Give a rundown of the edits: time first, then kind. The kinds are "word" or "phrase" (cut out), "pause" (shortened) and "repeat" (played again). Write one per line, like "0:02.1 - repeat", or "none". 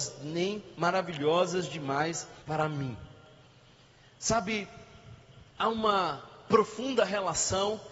0:02.4 - pause
0:05.5 - pause